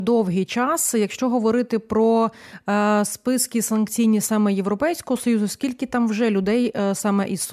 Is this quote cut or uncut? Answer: uncut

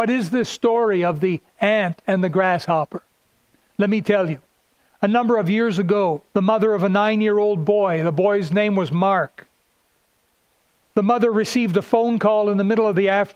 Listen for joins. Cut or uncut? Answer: cut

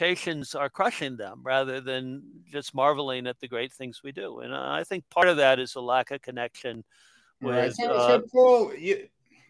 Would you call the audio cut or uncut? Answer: uncut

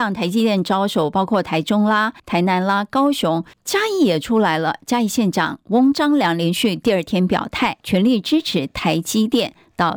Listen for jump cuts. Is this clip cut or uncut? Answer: cut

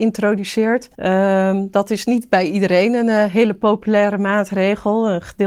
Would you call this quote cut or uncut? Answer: cut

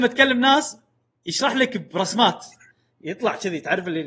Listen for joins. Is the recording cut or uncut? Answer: uncut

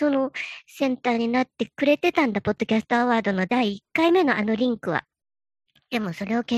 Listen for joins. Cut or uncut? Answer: uncut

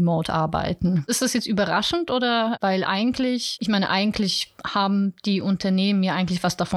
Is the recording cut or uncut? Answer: uncut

